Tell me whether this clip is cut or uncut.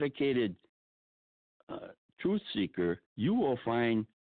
cut